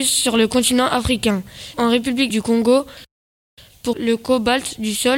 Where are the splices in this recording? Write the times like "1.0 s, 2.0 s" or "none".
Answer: 1.7 s, 2.3 s, 3.9 s